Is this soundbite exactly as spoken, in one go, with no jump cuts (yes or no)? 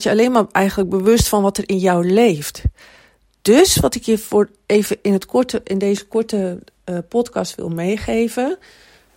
yes